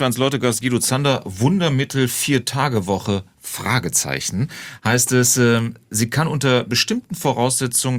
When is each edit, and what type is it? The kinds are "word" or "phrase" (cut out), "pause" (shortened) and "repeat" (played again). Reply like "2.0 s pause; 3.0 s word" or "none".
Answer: 3.3 s pause

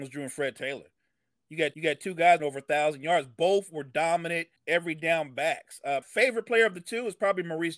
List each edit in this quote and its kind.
1.7 s repeat; 2.4 s phrase; 4.6 s pause; 6.0 s word

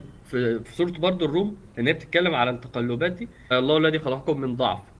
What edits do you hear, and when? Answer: 3.5 s word

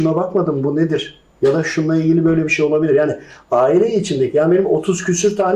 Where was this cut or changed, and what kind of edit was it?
none

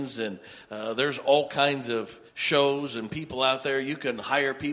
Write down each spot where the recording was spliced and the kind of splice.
2.3 s pause

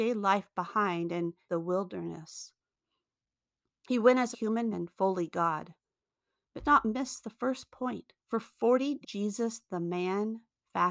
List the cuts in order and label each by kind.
1.5 s word; 4.3 s phrase; 4.7 s word; 6.6 s word; 8.2 s pause; 9.0 s word

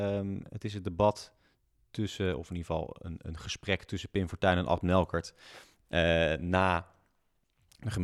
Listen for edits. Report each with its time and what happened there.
none

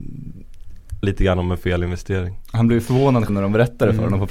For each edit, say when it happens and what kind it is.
1.0 s word; 3.3 s word

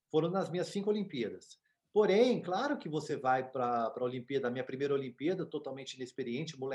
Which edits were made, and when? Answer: none

